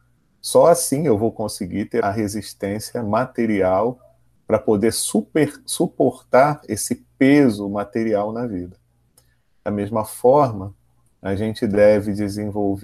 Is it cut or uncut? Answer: cut